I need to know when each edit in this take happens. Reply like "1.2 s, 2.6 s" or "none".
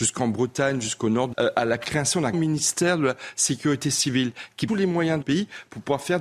1.3 s, 2.3 s, 4.7 s, 5.2 s